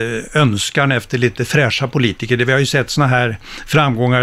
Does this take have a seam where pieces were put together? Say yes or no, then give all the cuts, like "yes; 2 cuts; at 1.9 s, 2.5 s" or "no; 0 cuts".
no; 0 cuts